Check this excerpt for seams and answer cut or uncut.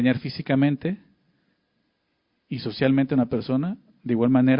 uncut